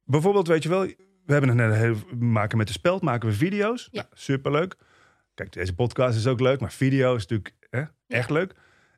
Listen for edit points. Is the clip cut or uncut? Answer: uncut